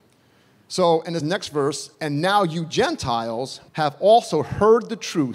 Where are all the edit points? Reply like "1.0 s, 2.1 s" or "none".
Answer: 1.2 s, 1.9 s, 3.7 s